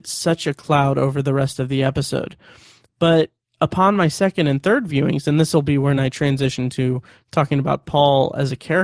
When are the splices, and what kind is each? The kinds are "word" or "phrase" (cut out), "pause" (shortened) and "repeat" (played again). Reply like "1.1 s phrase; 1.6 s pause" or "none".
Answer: none